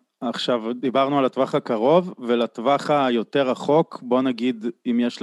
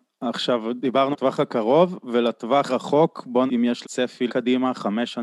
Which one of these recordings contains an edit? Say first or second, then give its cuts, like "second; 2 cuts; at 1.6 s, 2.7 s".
second; 5 cuts; at 1.1 s, 2.7 s, 3.5 s, 3.8 s, 4.3 s